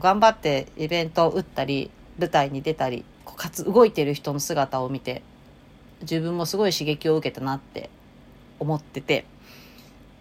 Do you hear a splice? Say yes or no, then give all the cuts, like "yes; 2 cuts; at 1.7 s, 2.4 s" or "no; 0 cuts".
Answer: yes; 1 cut; at 3.1 s